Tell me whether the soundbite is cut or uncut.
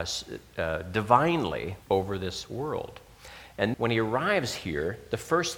cut